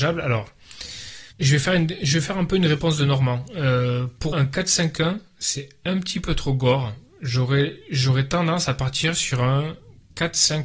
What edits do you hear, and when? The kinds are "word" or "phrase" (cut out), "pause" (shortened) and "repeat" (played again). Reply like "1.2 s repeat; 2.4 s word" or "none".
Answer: 1.3 s pause; 4.3 s word